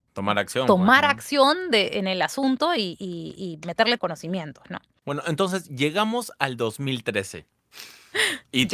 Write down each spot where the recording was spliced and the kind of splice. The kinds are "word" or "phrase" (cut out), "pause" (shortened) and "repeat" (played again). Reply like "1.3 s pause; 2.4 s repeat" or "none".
4.0 s phrase